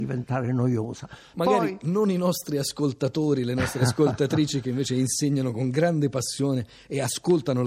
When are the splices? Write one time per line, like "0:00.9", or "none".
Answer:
none